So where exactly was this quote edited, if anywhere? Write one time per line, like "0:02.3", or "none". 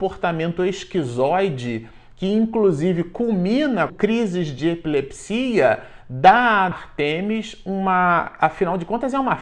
0:03.9
0:06.7